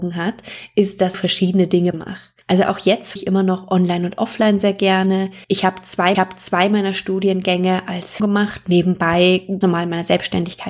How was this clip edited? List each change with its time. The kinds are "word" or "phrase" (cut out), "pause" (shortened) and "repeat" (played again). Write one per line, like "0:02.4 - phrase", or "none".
0:01.1 - phrase
0:01.9 - word
0:02.4 - pause
0:03.2 - word
0:05.4 - pause
0:06.1 - repeat
0:08.2 - word
0:09.6 - word